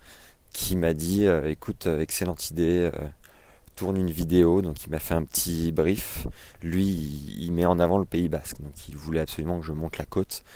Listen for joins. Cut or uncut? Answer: uncut